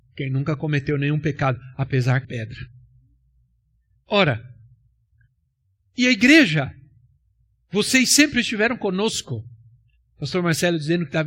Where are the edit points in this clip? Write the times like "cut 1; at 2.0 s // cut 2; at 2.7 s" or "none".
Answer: cut 1; at 2.2 s